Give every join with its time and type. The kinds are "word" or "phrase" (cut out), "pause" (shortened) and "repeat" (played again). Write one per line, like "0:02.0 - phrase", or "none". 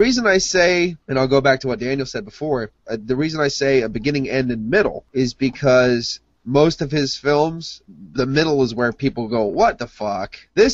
none